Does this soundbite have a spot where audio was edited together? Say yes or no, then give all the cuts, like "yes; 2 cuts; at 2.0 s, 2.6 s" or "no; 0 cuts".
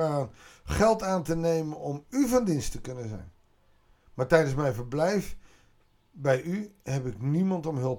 no; 0 cuts